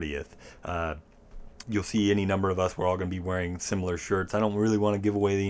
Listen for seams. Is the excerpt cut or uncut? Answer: cut